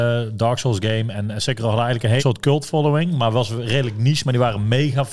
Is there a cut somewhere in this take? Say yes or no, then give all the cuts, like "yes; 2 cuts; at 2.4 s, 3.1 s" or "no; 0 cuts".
yes; 1 cut; at 2.2 s